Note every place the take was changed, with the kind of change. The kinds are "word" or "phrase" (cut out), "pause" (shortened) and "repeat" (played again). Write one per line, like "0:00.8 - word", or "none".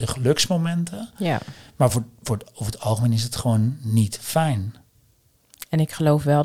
none